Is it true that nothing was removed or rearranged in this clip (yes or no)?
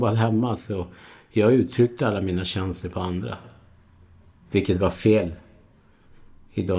yes